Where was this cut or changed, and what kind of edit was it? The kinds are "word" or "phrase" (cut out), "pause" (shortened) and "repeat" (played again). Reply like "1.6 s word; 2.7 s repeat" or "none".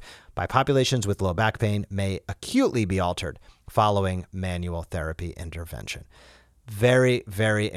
none